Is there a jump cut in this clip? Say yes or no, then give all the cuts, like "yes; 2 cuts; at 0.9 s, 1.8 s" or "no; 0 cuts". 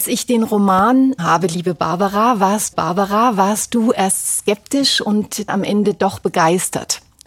yes; 3 cuts; at 1.2 s, 2.7 s, 5.5 s